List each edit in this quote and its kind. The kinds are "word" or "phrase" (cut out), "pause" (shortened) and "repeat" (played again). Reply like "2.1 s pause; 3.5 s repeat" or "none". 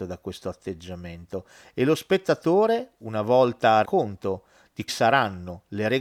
3.8 s word; 4.9 s word

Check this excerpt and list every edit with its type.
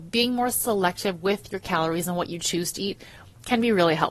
none

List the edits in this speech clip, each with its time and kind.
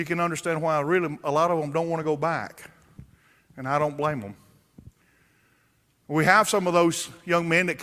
none

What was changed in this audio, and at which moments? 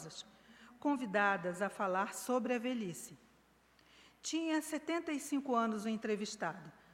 none

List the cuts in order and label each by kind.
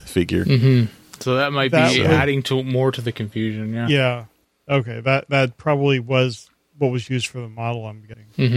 none

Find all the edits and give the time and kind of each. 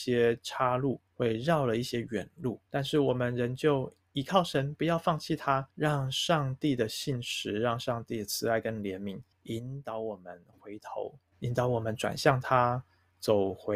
1.1 s pause; 2.7 s pause; 5.7 s pause; 9.3 s pause; 11.3 s pause

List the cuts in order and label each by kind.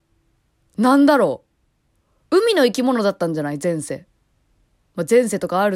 none

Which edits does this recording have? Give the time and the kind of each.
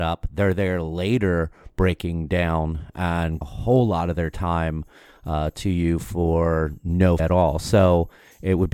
3.4 s word; 7.2 s word

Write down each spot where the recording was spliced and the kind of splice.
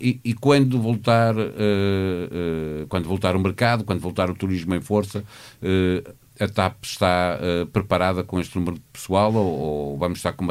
none

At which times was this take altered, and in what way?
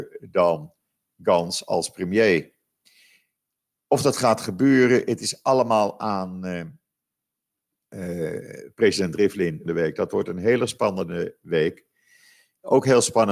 9.7 s word

